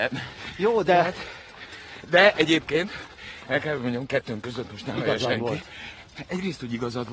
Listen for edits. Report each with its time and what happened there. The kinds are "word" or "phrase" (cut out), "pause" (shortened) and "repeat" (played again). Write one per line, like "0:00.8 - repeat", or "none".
none